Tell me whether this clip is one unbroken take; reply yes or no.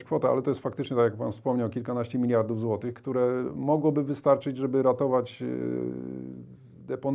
yes